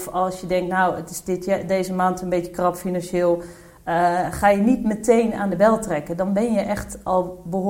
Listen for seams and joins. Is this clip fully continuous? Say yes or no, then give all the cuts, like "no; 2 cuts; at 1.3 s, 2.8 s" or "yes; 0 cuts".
yes; 0 cuts